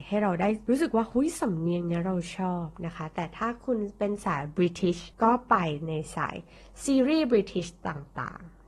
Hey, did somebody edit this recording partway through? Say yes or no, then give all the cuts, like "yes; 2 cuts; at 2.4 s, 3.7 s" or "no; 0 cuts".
no; 0 cuts